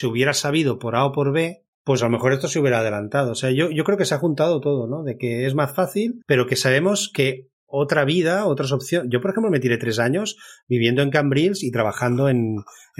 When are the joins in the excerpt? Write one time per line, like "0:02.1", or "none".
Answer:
0:01.7
0:06.2
0:07.5

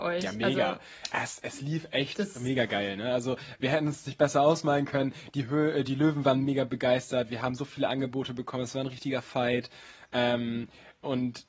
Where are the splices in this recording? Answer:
none

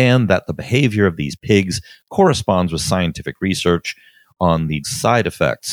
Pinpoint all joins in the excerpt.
0:04.8

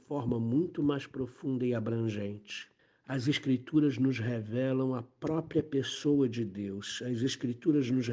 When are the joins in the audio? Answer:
0:02.8

